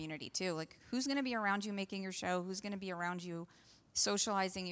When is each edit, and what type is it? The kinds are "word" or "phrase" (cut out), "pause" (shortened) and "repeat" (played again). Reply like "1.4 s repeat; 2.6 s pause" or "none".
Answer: none